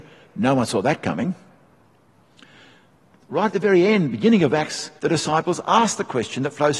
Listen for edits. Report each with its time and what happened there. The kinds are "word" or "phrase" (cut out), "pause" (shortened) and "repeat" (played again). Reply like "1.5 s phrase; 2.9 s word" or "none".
5.0 s pause